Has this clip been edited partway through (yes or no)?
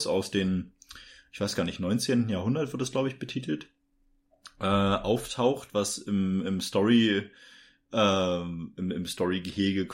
no